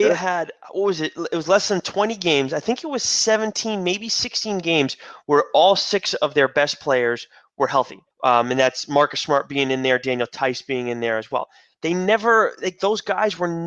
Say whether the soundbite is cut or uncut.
cut